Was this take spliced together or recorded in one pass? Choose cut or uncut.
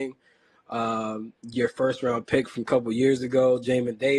uncut